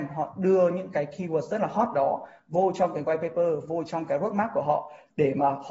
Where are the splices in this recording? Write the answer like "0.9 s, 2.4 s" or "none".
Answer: none

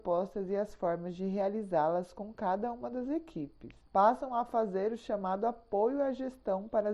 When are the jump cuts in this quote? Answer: 3.9 s

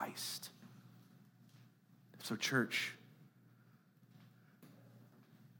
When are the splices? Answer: none

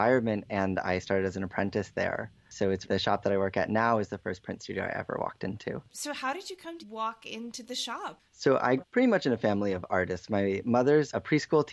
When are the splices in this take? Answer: 2.8 s, 5.9 s, 6.8 s, 8.3 s, 8.8 s

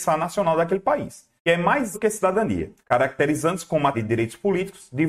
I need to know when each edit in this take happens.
1.4 s, 1.9 s, 2.8 s, 3.9 s

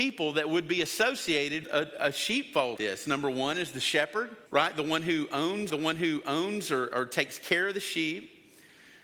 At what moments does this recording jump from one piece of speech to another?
1.6 s, 2.8 s, 4.5 s, 5.7 s

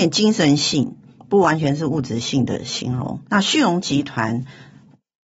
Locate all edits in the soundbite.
3.2 s

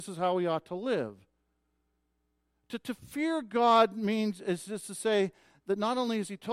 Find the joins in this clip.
none

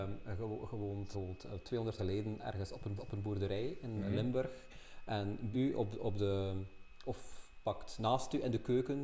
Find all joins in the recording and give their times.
1.1 s, 2.0 s, 3.0 s, 5.5 s

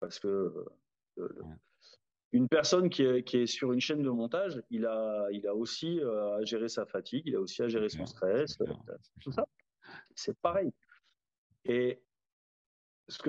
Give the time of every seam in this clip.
none

